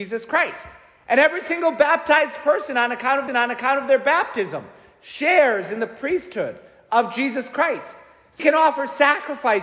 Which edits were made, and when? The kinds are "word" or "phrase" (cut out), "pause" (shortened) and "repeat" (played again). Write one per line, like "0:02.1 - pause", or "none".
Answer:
0:03.3 - repeat
0:08.4 - word